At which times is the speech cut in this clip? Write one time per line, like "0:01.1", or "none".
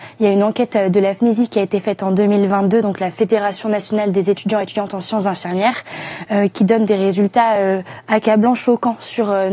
none